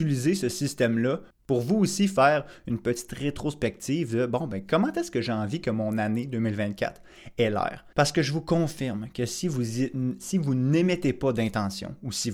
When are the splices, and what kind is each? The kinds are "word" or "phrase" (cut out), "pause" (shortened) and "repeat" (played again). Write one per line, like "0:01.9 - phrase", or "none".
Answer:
0:07.9 - pause